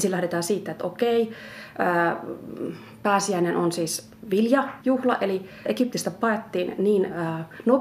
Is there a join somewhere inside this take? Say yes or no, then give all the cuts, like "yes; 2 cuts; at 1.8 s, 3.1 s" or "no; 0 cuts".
no; 0 cuts